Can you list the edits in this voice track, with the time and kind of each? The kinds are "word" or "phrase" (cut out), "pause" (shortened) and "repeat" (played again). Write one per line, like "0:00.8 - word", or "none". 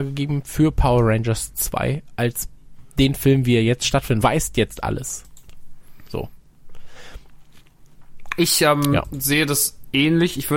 0:04.2 - phrase